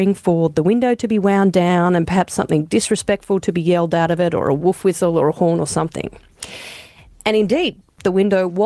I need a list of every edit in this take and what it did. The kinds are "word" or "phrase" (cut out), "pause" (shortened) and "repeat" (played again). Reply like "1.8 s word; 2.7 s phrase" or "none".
none